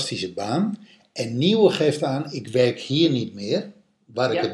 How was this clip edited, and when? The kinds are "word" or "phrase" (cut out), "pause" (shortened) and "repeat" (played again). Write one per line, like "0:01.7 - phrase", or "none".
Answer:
none